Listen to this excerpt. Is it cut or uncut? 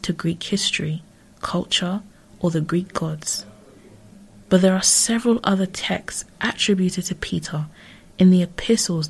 uncut